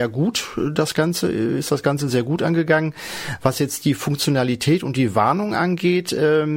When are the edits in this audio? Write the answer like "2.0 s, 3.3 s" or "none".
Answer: none